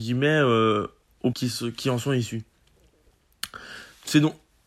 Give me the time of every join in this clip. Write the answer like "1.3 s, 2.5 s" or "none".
1.3 s